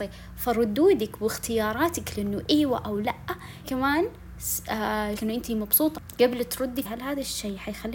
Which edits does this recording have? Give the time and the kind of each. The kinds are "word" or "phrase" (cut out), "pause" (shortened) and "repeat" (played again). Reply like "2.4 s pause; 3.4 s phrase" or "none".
2.1 s word; 3.6 s word; 5.2 s phrase; 6.8 s word